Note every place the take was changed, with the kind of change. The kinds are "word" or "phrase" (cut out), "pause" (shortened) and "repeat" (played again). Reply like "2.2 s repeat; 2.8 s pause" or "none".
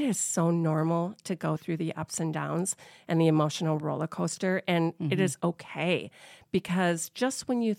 none